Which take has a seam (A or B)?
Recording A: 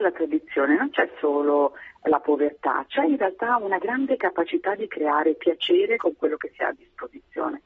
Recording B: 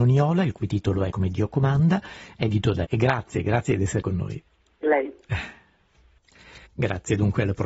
B